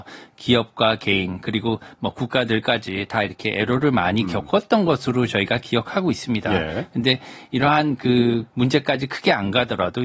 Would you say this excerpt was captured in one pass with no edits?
no; 1 cut; at 8.5 s

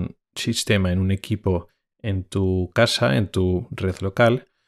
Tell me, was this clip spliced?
no; 0 cuts

